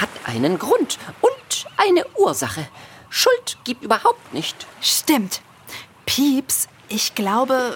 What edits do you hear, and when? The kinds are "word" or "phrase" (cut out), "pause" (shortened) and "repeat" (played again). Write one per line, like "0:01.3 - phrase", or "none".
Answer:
0:03.8 - word